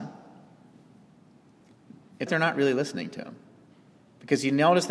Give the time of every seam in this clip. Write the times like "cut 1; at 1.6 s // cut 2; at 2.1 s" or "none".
cut 1; at 2.3 s